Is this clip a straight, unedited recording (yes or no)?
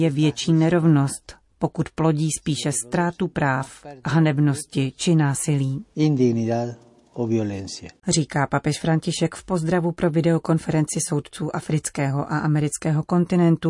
no